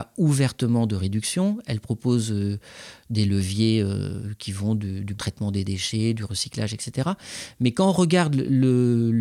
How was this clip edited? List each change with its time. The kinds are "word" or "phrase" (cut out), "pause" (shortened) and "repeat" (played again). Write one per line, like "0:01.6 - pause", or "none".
0:05.2 - word